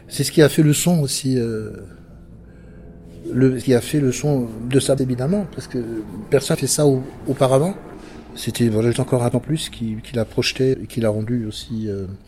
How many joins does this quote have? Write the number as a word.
eight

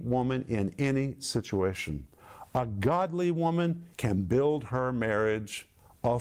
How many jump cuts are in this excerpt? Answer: one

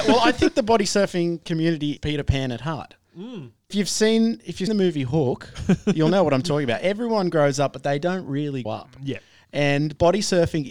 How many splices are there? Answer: four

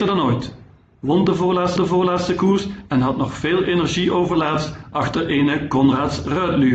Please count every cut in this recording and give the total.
one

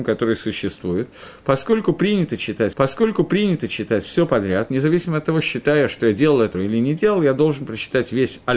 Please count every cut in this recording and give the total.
two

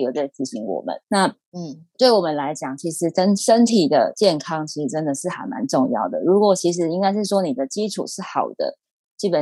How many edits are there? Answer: two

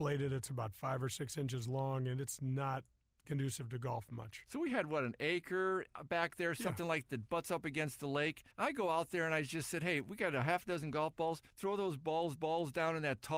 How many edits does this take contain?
four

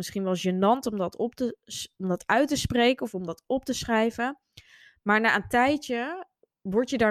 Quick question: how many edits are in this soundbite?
zero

